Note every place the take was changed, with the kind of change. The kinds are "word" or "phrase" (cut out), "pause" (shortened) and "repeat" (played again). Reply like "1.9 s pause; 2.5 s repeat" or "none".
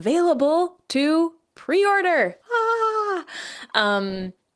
2.4 s pause